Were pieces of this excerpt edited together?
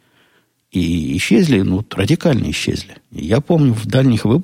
yes; 1 cut; at 3.0 s

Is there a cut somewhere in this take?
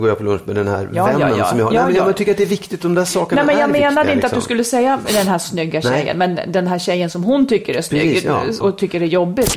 yes; 1 cut; at 8.6 s

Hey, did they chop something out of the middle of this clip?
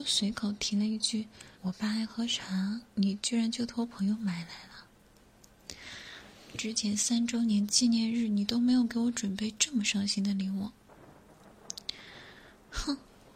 yes; 2 cuts; at 1.5 s, 2.9 s

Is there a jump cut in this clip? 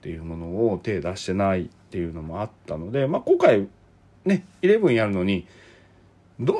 no; 0 cuts

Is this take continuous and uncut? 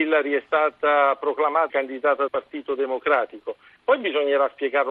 no; 2 cuts; at 1.7 s, 2.3 s

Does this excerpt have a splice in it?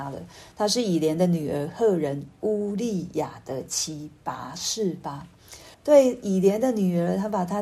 yes; 1 cut; at 5.7 s

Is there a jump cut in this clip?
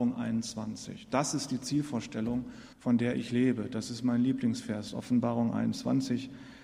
yes; 1 cut; at 2.7 s

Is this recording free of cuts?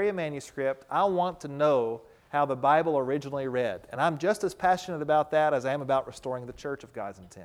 yes; 0 cuts

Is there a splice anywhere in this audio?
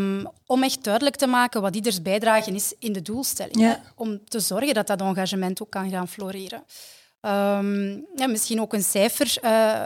no; 0 cuts

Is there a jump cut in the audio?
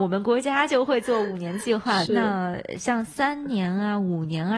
yes; 1 cut; at 2.1 s

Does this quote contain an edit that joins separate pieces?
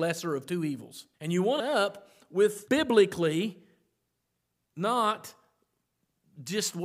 yes; 3 cuts; at 1.1 s, 1.6 s, 2.7 s

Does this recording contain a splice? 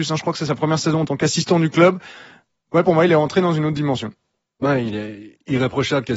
no; 0 cuts

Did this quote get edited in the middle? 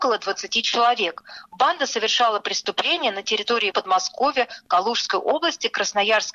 yes; 1 cut; at 3.7 s

